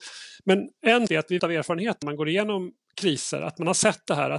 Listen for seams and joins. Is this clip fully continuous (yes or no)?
no